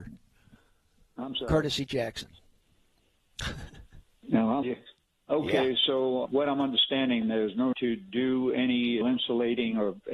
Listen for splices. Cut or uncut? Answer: cut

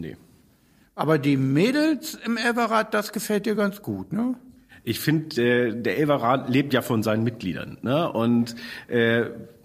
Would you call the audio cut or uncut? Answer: uncut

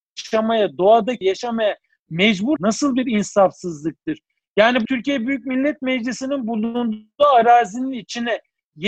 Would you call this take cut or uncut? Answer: cut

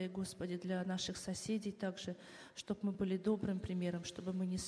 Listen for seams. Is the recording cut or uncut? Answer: uncut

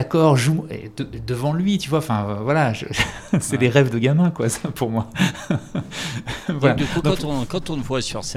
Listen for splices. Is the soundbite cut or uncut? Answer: uncut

